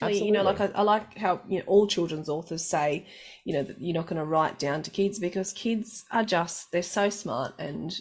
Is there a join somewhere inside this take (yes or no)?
no